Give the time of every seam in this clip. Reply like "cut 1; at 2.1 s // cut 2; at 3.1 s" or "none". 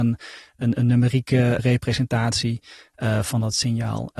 cut 1; at 1.6 s